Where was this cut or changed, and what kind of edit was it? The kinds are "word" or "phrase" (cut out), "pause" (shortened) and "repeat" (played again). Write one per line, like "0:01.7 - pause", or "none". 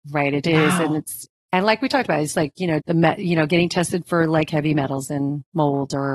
0:02.8 - word